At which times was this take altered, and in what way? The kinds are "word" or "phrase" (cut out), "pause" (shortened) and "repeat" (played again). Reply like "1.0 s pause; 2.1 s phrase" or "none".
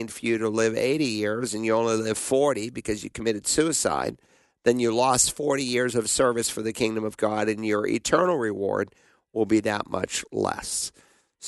none